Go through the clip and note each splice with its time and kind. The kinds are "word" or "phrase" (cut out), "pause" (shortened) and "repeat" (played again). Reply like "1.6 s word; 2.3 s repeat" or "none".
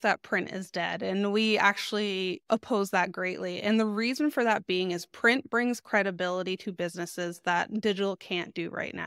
none